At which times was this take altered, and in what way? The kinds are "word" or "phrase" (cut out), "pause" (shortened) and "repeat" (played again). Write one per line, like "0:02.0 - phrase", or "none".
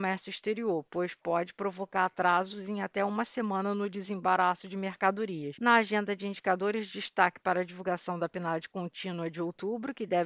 none